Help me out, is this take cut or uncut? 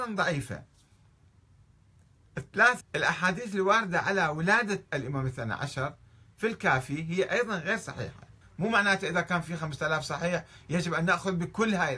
cut